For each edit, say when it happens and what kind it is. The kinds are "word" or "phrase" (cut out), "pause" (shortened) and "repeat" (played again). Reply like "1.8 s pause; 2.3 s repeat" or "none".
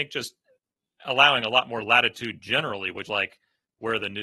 3.1 s word